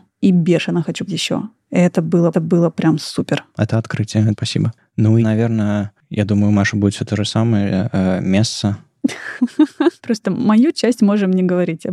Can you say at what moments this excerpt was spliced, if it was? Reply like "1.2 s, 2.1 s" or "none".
1.1 s, 2.3 s, 4.3 s, 5.2 s, 10.0 s